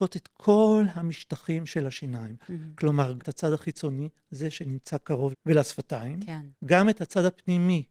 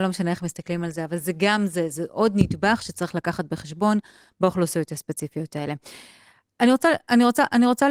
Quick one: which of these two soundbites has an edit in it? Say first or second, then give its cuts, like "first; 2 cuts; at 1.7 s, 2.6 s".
first; 3 cuts; at 3.2 s, 5.3 s, 6.5 s